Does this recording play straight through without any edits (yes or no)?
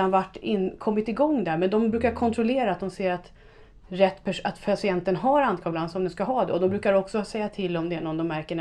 yes